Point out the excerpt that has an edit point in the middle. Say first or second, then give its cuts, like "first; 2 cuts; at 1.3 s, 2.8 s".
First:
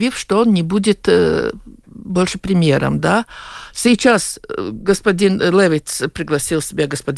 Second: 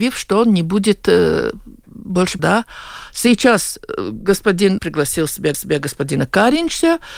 second; 3 cuts; at 2.4 s, 4.8 s, 5.5 s